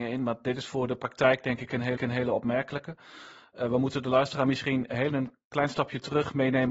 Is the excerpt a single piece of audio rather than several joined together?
no; 2 cuts; at 2.0 s, 5.1 s

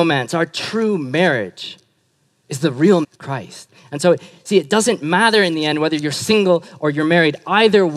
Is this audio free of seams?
no; 1 cut; at 3.0 s

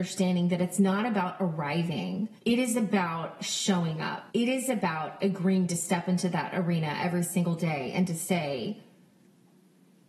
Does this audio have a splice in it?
yes; 2 cuts; at 2.4 s, 4.3 s

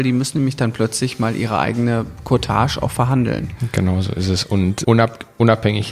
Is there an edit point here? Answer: yes; 1 cut; at 4.8 s

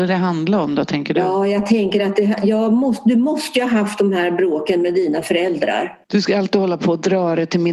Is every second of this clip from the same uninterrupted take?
no; 1 cut; at 6.0 s

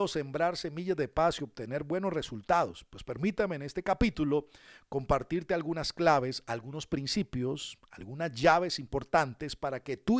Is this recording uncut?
yes; 0 cuts

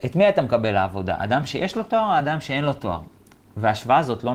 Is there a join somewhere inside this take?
no; 0 cuts

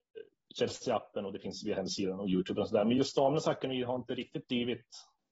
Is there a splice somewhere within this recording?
no; 0 cuts

